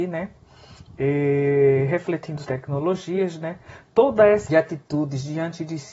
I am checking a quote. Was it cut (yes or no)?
yes